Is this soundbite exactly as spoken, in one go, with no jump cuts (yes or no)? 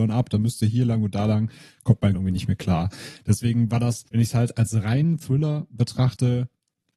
no